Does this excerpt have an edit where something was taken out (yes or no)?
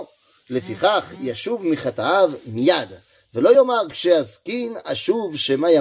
no